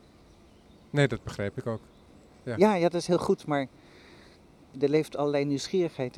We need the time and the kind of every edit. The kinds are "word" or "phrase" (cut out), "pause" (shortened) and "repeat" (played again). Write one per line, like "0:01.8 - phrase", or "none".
none